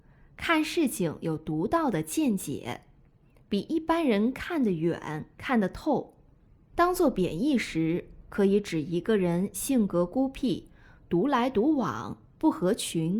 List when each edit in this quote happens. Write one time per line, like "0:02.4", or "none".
none